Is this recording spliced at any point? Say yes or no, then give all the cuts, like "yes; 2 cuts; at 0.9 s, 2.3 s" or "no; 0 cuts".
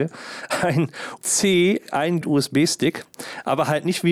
yes; 2 cuts; at 1.2 s, 2.2 s